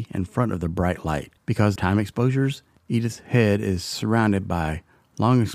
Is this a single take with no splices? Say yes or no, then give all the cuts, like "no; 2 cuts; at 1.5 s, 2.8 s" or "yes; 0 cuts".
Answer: no; 2 cuts; at 1.4 s, 1.8 s